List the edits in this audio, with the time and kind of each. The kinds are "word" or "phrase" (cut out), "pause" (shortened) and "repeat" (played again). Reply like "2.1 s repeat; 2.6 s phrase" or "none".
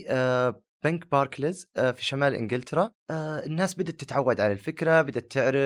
none